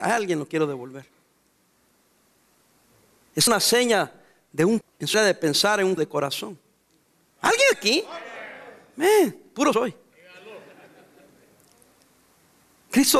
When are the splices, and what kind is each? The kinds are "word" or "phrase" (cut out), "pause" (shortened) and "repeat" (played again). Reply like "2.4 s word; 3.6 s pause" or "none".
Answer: 3.5 s word; 4.8 s word; 5.1 s word; 6.0 s word; 7.7 s word; 9.7 s word